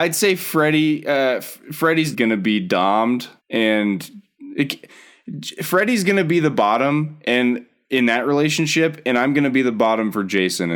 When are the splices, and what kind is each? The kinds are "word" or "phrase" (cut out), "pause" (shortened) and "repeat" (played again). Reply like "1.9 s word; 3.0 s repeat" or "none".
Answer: 2.1 s word; 3.4 s pause